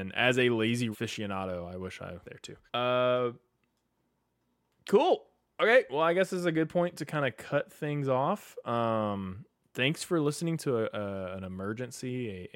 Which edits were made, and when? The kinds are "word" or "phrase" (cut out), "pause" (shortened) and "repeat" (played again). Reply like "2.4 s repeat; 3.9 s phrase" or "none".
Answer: 0.9 s phrase; 2.2 s word; 2.7 s pause